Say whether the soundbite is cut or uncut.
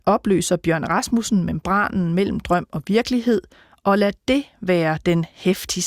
uncut